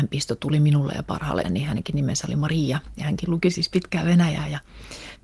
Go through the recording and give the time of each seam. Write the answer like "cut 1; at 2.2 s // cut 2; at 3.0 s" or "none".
cut 1; at 1.4 s

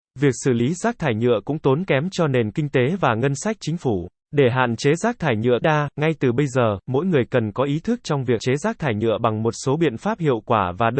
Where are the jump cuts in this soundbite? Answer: cut 1; at 4.2 s // cut 2; at 5.6 s // cut 3; at 8.4 s

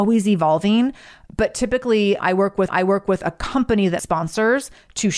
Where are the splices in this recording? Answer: cut 1; at 2.7 s // cut 2; at 4.0 s

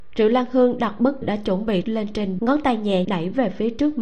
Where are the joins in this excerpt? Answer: cut 1; at 1.2 s // cut 2; at 1.8 s // cut 3; at 2.4 s // cut 4; at 3.0 s

